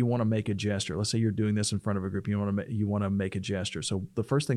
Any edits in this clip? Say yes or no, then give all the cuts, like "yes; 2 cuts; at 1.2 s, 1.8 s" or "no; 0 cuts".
no; 0 cuts